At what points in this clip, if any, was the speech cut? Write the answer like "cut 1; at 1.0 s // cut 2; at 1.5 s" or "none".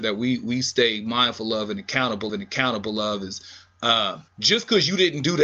cut 1; at 2.3 s // cut 2; at 4.3 s

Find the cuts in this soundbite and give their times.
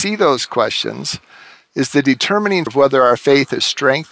cut 1; at 2.7 s

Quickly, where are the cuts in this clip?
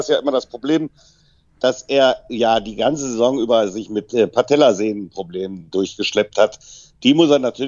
none

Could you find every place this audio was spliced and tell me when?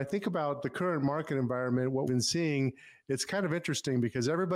cut 1; at 2.1 s

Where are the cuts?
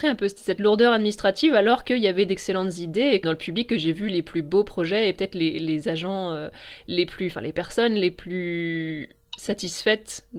cut 1; at 3.2 s

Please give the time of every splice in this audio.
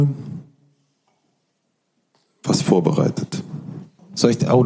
none

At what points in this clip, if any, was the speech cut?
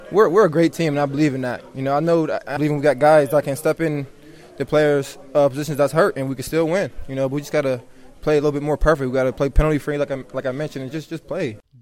cut 1; at 2.6 s

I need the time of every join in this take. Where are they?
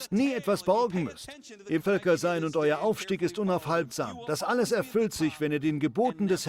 cut 1; at 1.8 s

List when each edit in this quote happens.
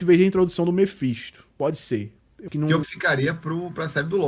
cut 1; at 1.5 s // cut 2; at 2.5 s // cut 3; at 2.8 s

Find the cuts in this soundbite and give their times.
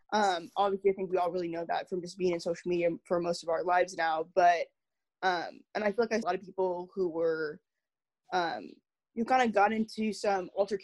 cut 1; at 6.2 s

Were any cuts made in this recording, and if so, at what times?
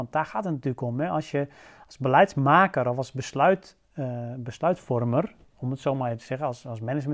none

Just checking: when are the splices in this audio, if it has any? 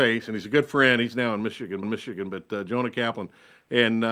cut 1; at 1.8 s

